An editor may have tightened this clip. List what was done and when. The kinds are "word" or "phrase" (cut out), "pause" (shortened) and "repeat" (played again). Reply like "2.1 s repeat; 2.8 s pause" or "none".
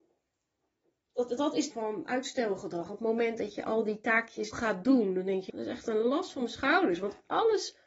1.7 s phrase; 4.5 s phrase; 5.5 s word